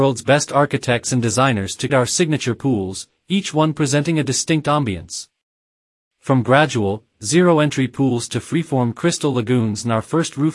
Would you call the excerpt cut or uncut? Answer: cut